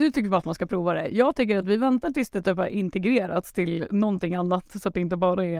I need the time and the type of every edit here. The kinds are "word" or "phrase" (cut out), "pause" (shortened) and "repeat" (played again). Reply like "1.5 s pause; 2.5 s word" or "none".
none